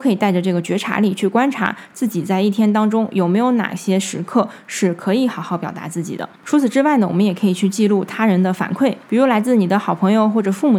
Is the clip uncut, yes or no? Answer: no